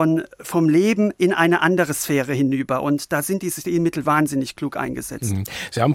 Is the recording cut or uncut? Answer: uncut